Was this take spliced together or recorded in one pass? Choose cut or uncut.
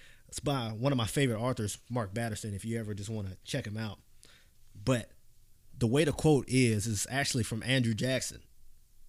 uncut